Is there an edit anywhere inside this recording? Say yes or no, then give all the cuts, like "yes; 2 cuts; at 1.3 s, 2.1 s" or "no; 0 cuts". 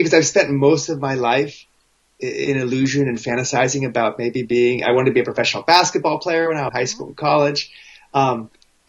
yes; 1 cut; at 6.7 s